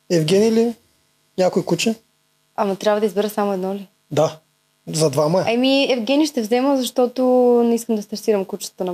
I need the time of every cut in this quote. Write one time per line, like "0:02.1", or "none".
none